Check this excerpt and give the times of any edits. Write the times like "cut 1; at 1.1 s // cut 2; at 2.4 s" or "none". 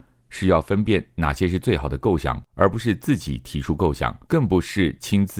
cut 1; at 2.5 s // cut 2; at 4.2 s

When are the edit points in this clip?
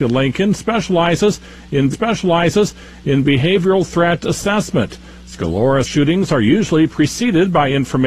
cut 1; at 1.9 s // cut 2; at 5.8 s

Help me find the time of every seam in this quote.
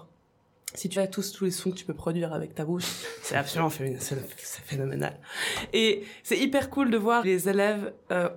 cut 1; at 1.0 s // cut 2; at 3.0 s // cut 3; at 7.2 s

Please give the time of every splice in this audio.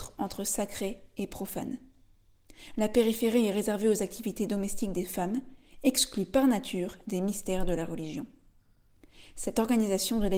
none

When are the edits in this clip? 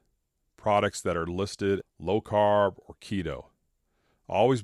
cut 1; at 1.8 s

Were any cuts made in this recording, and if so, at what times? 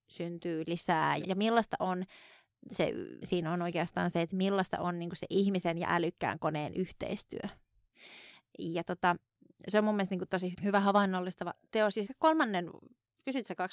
cut 1; at 1.2 s // cut 2; at 3.2 s // cut 3; at 10.5 s // cut 4; at 12.1 s

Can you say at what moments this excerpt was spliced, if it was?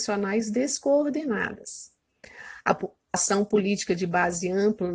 cut 1; at 3.1 s

